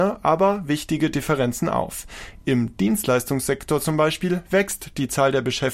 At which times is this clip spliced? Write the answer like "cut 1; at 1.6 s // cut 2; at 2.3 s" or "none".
none